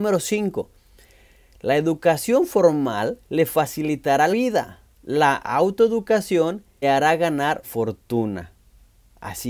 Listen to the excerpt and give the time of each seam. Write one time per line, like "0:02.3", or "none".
0:03.2
0:04.3
0:04.9
0:06.8
0:07.6